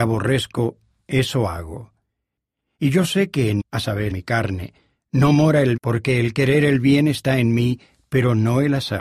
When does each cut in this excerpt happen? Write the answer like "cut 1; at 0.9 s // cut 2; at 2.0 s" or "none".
cut 1; at 3.6 s // cut 2; at 4.1 s // cut 3; at 5.8 s